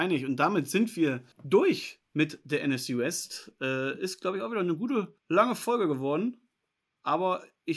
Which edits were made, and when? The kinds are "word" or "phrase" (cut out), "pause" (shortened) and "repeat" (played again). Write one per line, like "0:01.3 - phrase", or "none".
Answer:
0:01.3 - pause
0:05.2 - pause